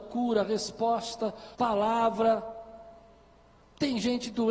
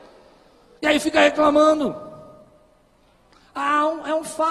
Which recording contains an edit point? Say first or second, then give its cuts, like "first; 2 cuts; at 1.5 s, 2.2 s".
first; 1 cut; at 1.5 s